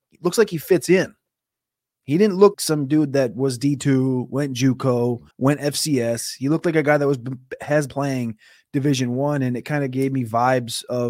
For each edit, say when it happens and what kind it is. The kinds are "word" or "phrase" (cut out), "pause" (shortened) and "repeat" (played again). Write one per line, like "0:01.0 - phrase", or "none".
0:02.5 - word
0:05.3 - pause
0:07.9 - word